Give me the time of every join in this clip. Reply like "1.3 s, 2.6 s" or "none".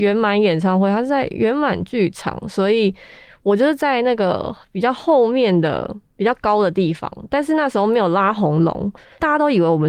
none